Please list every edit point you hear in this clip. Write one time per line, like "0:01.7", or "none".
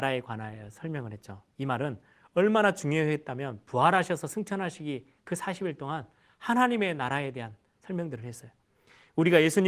none